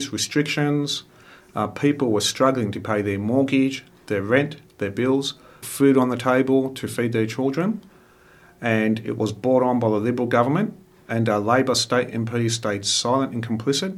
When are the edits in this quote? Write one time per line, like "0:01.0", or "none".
0:05.6